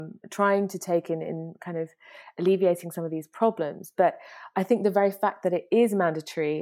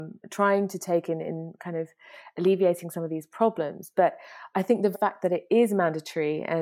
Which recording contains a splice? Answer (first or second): second